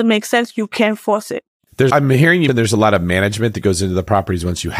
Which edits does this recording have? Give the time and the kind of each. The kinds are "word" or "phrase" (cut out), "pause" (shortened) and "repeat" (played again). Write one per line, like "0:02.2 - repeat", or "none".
0:01.9 - word
0:02.5 - word